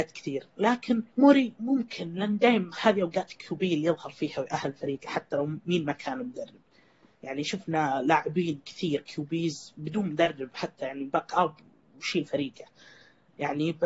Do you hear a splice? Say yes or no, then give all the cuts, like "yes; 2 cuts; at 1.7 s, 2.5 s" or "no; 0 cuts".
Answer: yes; 2 cuts; at 1.1 s, 2.8 s